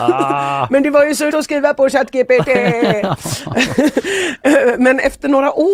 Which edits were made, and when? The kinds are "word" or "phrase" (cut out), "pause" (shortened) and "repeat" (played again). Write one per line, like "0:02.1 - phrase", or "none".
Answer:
0:01.3 - word